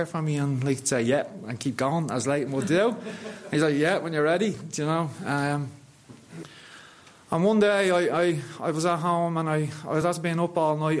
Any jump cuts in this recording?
no; 0 cuts

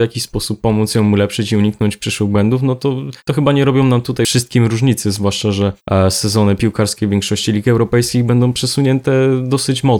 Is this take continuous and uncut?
no; 1 cut; at 3.2 s

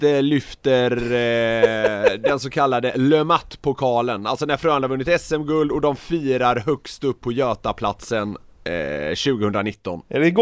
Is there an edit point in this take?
no; 0 cuts

